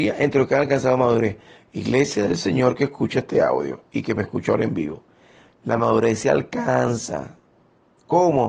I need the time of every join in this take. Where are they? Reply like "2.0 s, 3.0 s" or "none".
none